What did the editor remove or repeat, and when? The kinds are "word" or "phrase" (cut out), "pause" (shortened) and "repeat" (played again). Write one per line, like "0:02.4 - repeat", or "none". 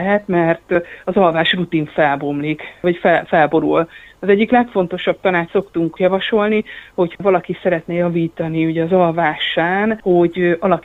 0:05.5 - word
0:07.1 - word